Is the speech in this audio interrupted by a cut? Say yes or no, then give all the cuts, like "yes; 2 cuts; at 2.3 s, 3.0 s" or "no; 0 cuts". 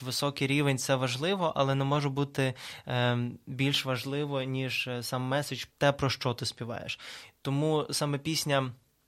yes; 1 cut; at 5.7 s